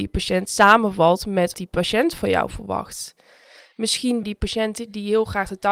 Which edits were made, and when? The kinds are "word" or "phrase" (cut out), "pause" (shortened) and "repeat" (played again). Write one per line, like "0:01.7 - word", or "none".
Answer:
0:01.5 - word
0:04.2 - word